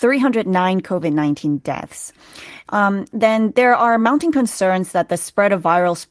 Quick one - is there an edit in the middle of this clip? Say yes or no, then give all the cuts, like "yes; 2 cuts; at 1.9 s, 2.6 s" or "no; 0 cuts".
no; 0 cuts